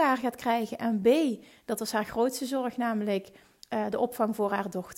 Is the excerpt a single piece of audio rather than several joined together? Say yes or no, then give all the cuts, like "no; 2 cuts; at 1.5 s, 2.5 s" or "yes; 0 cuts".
yes; 0 cuts